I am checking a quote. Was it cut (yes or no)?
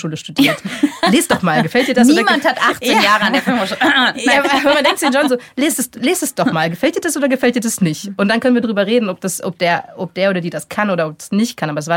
no